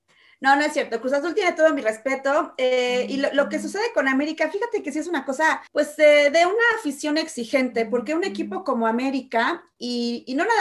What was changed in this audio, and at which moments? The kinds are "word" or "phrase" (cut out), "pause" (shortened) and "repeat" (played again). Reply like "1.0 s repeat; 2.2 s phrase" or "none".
5.7 s pause